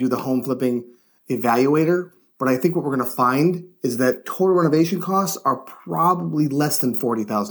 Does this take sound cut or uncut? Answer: uncut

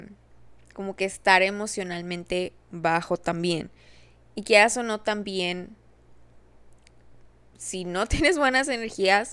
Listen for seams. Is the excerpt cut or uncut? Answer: uncut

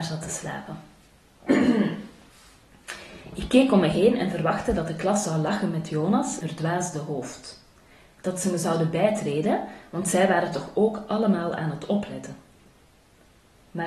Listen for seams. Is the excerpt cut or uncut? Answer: cut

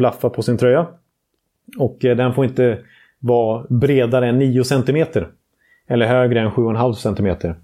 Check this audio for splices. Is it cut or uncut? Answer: uncut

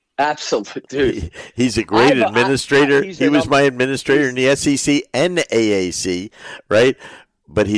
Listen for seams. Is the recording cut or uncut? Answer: uncut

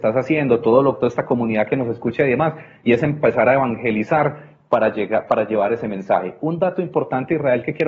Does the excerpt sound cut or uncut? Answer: uncut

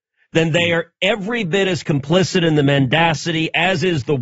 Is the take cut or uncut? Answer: uncut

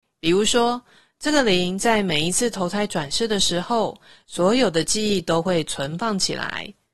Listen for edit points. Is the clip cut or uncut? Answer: uncut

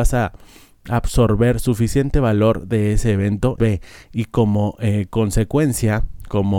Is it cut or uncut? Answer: cut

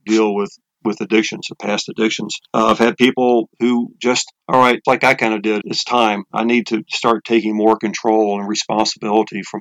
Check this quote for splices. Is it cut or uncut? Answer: cut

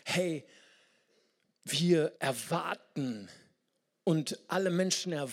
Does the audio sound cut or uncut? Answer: cut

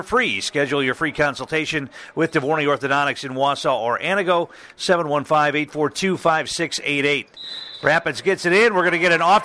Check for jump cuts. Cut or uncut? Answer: uncut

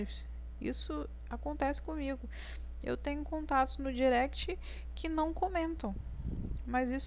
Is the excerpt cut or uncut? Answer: uncut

